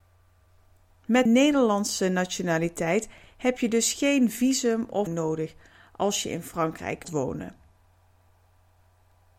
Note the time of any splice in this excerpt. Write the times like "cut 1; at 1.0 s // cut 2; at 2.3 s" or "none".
cut 1; at 1.3 s // cut 2; at 5.1 s // cut 3; at 7.0 s